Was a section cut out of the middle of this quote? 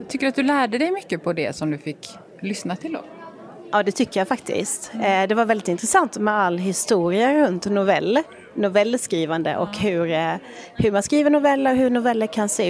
no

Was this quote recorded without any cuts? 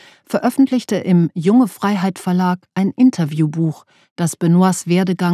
yes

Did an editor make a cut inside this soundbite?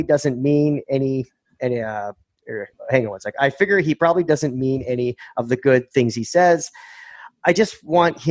no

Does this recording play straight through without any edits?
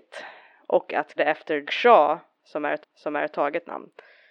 no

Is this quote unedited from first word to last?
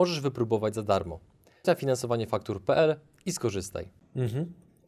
no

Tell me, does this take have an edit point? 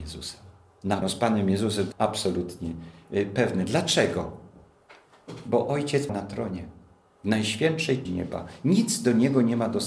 yes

